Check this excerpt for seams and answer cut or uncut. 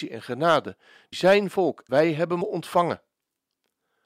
cut